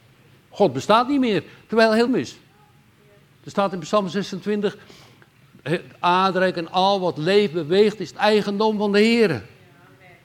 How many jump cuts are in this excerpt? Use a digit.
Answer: 1